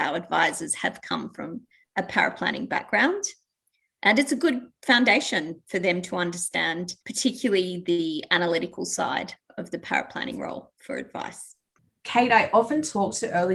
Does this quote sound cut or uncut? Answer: uncut